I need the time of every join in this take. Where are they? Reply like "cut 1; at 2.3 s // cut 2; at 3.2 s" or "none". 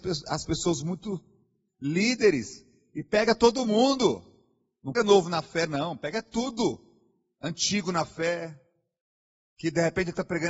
cut 1; at 4.9 s